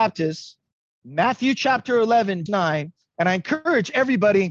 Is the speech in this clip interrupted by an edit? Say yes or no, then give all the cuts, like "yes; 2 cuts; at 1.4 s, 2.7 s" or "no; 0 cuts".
yes; 1 cut; at 2.5 s